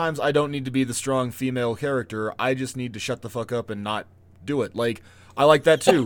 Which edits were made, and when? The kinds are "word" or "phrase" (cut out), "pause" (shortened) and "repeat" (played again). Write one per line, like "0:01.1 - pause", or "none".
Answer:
none